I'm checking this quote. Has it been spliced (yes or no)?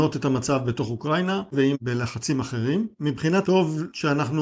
yes